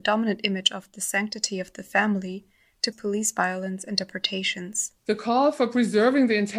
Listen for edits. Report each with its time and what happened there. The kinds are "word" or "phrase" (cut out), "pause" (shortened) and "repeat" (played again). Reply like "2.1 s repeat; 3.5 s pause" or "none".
2.9 s word; 5.0 s pause